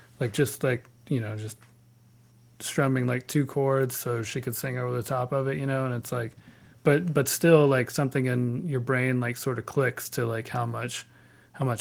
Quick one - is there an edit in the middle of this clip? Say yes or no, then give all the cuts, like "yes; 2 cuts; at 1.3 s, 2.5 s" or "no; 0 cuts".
no; 0 cuts